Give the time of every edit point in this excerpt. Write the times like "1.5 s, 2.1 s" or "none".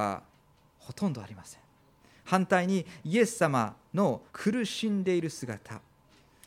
1.7 s, 4.3 s